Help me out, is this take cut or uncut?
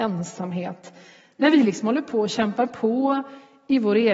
uncut